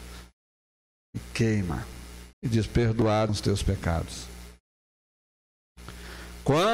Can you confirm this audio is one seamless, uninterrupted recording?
no; 2 cuts; at 2.3 s, 3.3 s

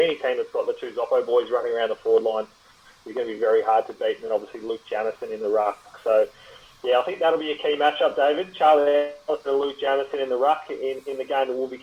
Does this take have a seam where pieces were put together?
no; 0 cuts

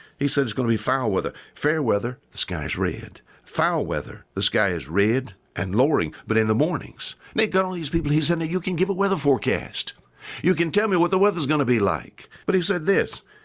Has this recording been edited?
yes; 2 cuts; at 4.3 s, 12.4 s

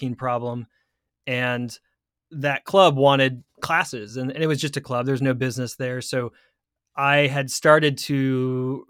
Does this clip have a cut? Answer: no; 0 cuts

